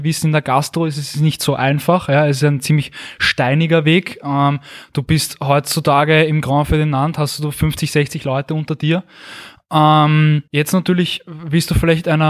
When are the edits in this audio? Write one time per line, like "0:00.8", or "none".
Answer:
0:10.5